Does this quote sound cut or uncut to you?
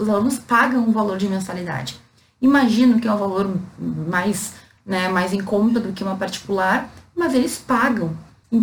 uncut